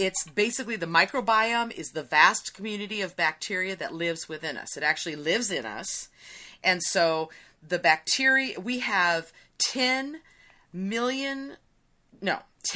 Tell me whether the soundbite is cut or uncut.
uncut